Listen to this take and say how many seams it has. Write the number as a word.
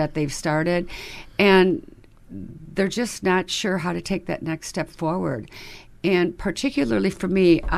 zero